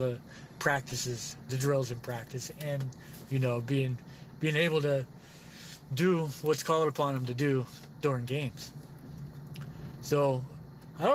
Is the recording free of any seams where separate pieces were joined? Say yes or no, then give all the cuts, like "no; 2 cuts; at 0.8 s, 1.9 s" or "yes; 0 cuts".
no; 1 cut; at 1.5 s